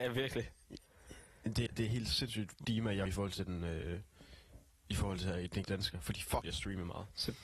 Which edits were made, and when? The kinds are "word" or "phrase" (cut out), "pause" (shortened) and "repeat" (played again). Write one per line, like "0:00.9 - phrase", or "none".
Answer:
0:01.7 - word
0:02.6 - word
0:03.1 - word
0:05.6 - word
0:06.4 - word